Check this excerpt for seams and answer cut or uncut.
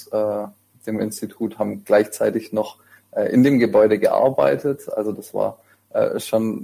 uncut